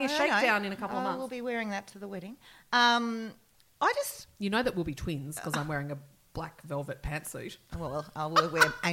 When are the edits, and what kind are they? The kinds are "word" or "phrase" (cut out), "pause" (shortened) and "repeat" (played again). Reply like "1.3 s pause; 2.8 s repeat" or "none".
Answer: none